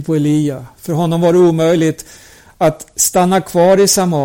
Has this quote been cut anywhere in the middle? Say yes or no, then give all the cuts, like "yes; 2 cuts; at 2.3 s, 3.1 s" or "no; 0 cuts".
no; 0 cuts